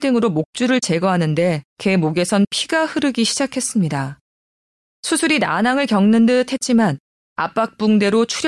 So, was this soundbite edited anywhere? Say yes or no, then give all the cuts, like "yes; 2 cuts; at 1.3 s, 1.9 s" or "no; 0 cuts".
yes; 1 cut; at 1.7 s